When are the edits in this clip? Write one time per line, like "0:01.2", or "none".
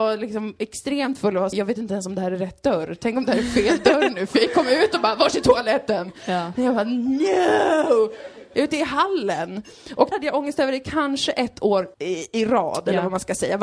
0:01.5
0:10.1
0:11.9

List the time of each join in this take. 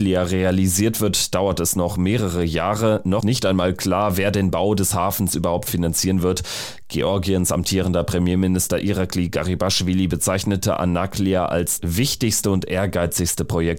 0:03.2
0:11.8

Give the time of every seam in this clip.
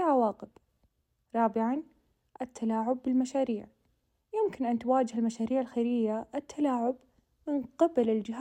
none

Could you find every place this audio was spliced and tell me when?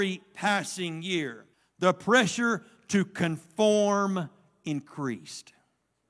0:01.5

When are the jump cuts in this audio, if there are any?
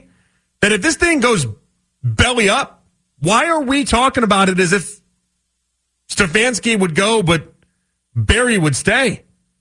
none

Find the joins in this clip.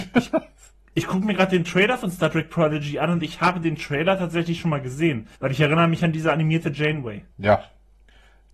0:05.4
0:07.3

